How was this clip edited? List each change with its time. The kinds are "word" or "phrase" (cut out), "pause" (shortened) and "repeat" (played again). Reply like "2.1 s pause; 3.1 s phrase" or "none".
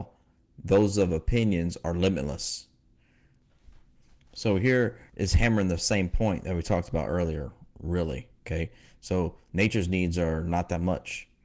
5.1 s pause; 8.4 s pause